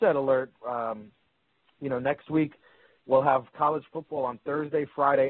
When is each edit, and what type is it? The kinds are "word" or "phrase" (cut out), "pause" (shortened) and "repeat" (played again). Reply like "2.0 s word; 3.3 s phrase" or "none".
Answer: none